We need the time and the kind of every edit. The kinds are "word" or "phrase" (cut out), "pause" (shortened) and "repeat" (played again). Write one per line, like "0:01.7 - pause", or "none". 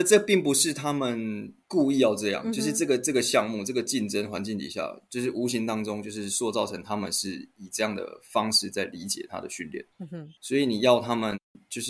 0:01.6 - pause
0:09.9 - pause
0:10.4 - pause